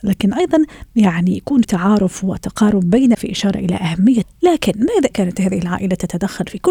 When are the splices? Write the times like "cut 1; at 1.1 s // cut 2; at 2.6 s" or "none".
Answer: cut 1; at 1.6 s // cut 2; at 3.1 s // cut 3; at 4.2 s // cut 4; at 5.1 s